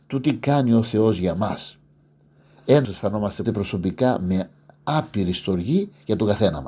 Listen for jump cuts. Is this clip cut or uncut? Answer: cut